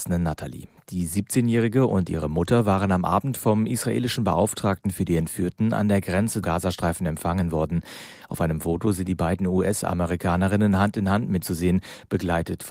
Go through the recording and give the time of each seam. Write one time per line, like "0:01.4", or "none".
0:06.4
0:11.4